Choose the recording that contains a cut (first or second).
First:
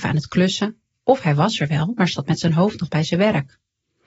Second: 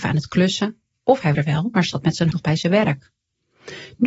second